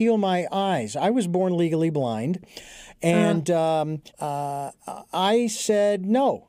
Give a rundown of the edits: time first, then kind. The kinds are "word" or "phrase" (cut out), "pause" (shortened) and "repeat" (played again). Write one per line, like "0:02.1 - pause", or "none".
0:04.1 - pause